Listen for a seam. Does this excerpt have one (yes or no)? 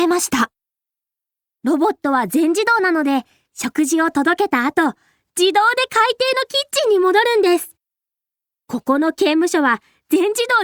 no